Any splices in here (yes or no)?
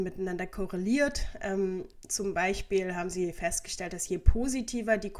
no